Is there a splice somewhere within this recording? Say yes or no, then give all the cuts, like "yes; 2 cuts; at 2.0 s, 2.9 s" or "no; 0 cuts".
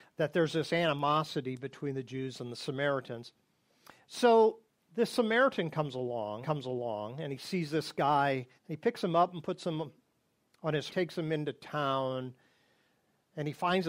yes; 4 cuts; at 4.7 s, 6.4 s, 8.6 s, 10.9 s